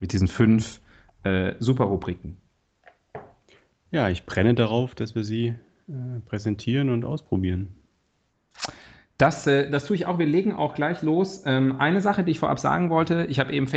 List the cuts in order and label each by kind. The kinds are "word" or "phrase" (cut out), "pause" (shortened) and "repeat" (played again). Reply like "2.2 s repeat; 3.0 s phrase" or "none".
none